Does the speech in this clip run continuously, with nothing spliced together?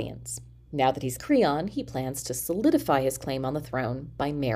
no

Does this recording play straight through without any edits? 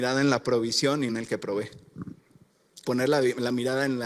no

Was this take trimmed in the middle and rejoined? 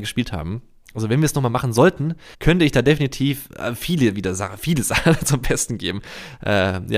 yes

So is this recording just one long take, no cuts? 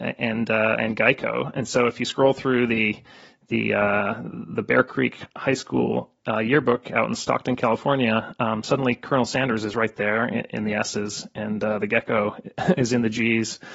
yes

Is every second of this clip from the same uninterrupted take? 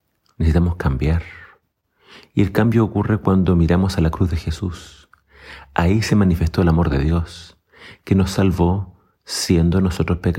yes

